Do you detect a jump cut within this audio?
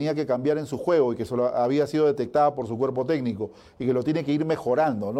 no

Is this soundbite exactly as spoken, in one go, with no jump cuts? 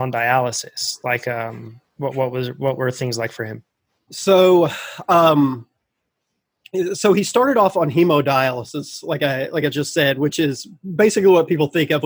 yes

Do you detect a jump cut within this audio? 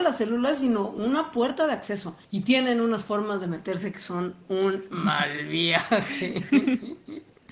yes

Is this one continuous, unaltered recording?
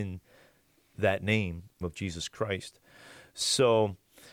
no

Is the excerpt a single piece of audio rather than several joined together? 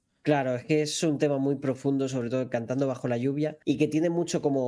no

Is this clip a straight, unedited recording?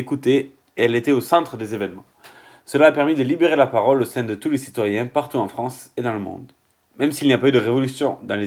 yes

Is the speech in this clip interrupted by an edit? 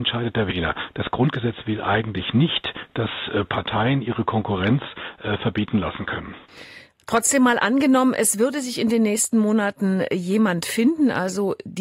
no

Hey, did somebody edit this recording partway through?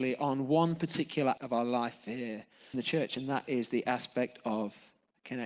yes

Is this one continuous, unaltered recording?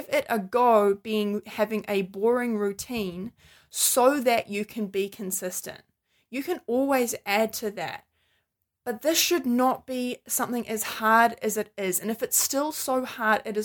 yes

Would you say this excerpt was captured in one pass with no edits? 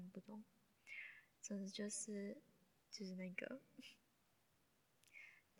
no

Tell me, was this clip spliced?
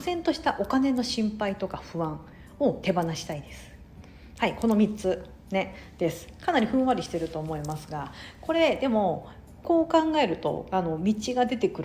no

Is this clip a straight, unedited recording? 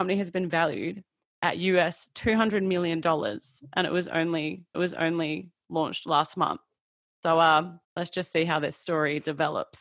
no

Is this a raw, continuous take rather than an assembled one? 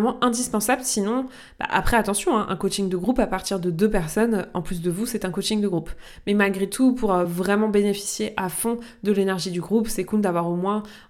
yes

